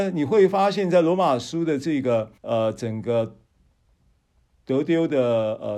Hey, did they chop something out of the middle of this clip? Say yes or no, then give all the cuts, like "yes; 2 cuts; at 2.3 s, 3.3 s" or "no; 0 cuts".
yes; 1 cut; at 2.4 s